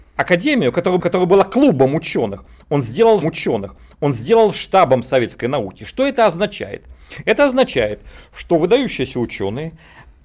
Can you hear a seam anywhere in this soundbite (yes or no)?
yes